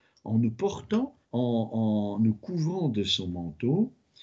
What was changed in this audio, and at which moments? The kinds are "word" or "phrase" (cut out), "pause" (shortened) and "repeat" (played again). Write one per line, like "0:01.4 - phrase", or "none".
0:01.2 - pause